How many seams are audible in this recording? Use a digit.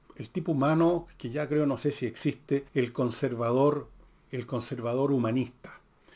2